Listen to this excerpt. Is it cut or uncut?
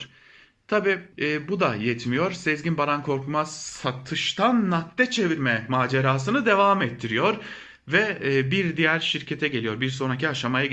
cut